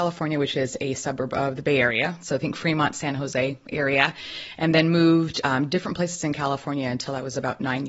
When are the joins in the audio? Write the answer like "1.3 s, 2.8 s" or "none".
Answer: none

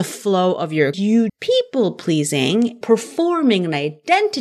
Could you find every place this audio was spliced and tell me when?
0.9 s, 1.3 s, 2.8 s

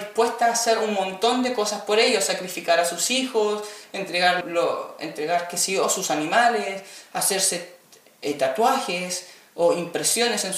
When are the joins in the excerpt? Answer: 4.4 s

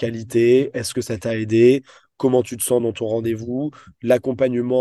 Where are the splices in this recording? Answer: none

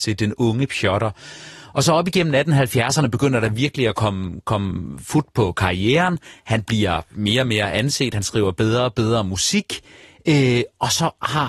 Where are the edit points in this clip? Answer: none

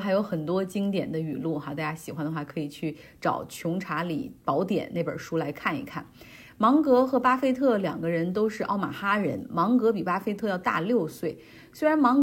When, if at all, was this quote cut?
4.4 s

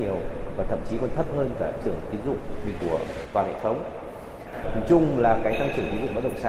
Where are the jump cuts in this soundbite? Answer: 1.8 s, 2.8 s

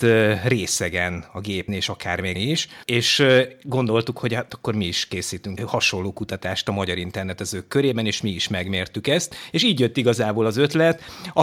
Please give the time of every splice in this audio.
1.7 s, 2.3 s, 5.6 s

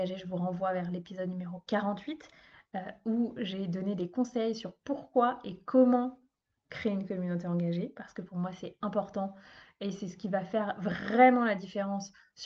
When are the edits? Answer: none

